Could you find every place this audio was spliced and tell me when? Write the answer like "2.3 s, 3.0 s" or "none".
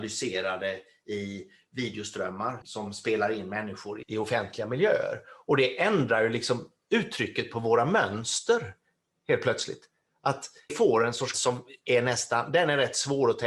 2.6 s, 4.0 s, 10.7 s, 11.3 s